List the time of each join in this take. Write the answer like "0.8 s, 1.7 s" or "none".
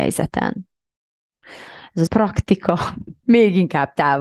2.1 s, 3.2 s